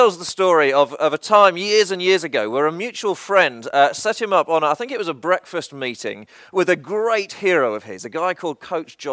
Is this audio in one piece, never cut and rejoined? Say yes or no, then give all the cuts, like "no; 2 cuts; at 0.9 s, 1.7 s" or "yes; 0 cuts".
yes; 0 cuts